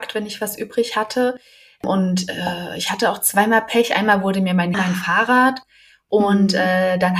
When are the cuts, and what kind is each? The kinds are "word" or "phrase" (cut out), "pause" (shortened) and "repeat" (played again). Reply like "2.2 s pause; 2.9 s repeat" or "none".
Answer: 4.7 s phrase